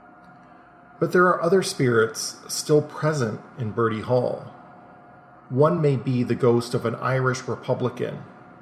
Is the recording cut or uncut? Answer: uncut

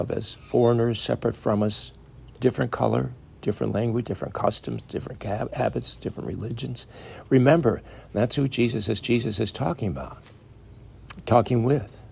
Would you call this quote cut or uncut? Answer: cut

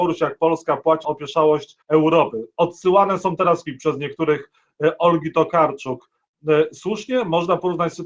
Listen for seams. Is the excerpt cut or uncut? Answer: cut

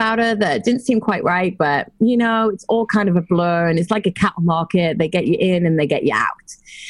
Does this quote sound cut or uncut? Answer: uncut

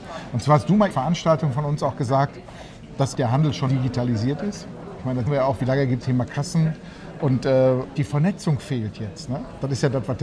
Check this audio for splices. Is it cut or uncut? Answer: cut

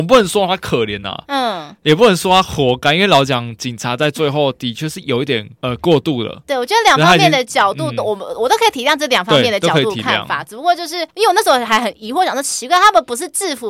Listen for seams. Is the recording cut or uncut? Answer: uncut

